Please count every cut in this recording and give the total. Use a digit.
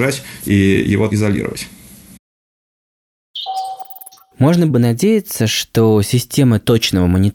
2